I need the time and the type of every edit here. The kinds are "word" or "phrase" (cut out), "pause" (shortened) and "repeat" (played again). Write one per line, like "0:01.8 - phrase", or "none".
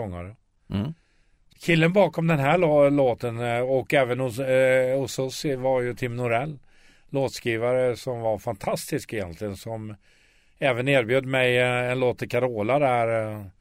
none